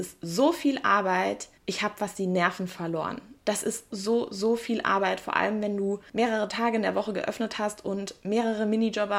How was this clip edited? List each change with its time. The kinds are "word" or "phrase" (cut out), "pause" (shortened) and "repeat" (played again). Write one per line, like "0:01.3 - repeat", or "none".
0:01.5 - pause
0:03.9 - word